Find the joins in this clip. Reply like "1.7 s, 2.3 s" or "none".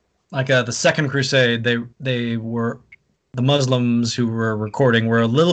1.9 s